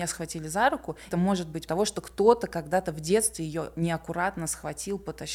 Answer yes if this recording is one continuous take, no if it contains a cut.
no